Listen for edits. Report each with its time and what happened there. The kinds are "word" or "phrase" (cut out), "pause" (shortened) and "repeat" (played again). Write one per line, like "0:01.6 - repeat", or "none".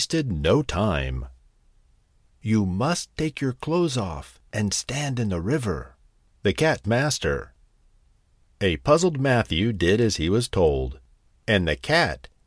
0:04.5 - pause
0:06.8 - phrase